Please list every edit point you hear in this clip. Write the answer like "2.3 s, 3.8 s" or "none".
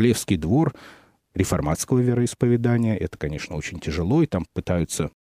none